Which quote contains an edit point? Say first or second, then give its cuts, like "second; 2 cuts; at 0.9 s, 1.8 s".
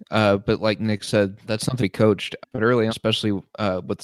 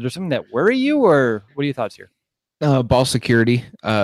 first; 4 cuts; at 1.4 s, 1.8 s, 2.4 s, 2.9 s